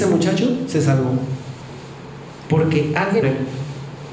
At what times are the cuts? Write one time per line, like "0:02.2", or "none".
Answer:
0:03.2